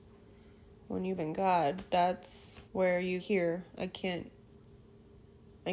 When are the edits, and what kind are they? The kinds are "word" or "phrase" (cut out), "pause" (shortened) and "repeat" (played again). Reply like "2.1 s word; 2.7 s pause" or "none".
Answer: 1.2 s word; 2.6 s pause; 3.2 s word

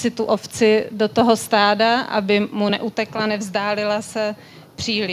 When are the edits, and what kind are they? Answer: none

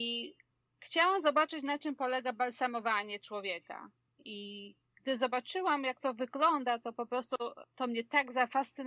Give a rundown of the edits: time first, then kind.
none

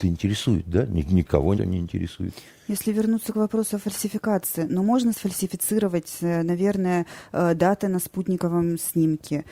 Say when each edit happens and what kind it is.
1.6 s word

